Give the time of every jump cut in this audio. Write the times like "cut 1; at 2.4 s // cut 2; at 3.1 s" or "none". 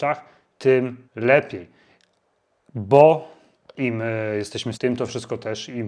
cut 1; at 1.0 s // cut 2; at 3.5 s // cut 3; at 4.7 s